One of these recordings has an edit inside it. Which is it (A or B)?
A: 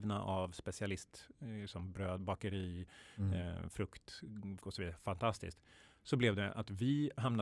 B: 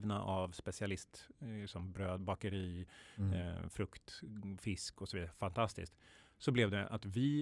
A